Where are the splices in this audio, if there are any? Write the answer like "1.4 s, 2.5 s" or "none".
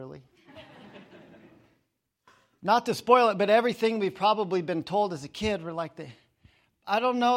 none